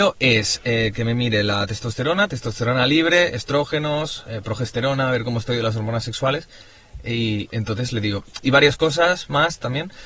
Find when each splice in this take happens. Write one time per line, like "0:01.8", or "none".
none